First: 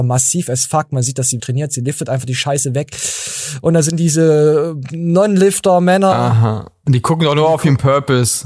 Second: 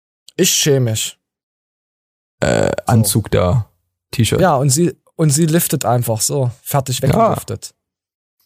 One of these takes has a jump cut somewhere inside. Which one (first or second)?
first